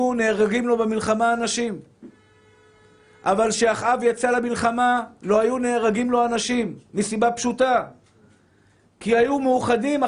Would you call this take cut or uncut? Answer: uncut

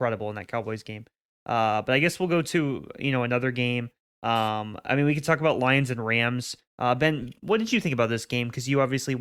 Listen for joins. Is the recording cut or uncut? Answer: uncut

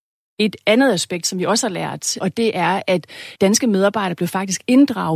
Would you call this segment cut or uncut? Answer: cut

